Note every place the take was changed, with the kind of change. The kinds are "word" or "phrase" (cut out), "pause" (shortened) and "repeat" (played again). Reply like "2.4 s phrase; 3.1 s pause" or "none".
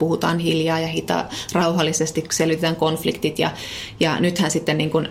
none